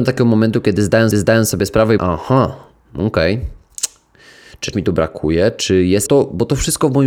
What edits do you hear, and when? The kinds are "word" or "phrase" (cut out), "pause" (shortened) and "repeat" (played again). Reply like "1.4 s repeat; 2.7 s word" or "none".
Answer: 1.1 s repeat; 2.0 s phrase; 2.8 s pause; 4.7 s word; 6.1 s phrase